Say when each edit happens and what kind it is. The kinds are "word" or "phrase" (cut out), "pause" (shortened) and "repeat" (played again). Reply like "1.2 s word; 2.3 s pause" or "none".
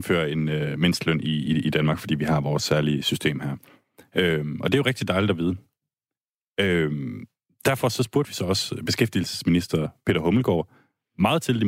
none